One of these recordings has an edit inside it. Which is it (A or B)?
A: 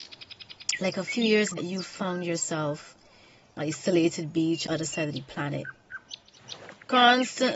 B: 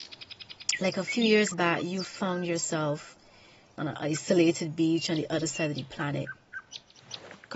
A